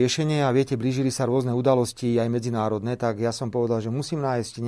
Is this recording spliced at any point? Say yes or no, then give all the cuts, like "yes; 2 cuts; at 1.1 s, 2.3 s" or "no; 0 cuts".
no; 0 cuts